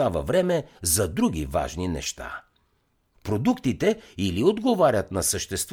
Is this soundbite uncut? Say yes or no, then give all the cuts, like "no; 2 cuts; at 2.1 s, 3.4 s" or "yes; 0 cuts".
yes; 0 cuts